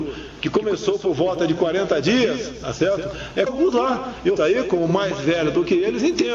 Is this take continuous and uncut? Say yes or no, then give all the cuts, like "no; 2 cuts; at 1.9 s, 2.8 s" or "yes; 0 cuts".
no; 2 cuts; at 3.5 s, 4.4 s